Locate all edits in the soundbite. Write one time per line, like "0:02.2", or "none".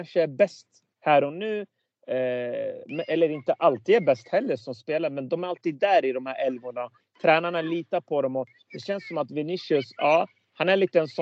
0:04.6